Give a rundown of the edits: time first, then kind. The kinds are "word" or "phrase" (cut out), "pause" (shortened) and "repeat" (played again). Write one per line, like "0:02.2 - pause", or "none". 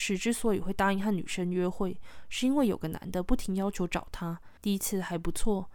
0:04.6 - pause